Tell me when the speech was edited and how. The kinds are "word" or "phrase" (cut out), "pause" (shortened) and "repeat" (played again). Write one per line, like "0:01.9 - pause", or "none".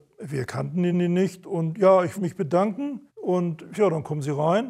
0:00.9 - repeat
0:02.1 - word
0:03.1 - pause
0:03.7 - word